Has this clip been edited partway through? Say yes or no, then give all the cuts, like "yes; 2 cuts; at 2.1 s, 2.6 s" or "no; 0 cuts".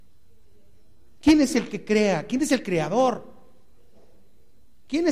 no; 0 cuts